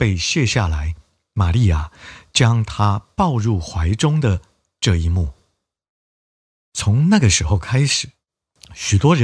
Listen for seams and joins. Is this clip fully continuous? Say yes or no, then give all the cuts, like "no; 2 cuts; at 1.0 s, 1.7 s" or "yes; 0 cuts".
yes; 0 cuts